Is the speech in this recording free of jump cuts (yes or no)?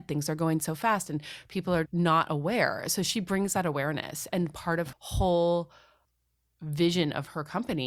no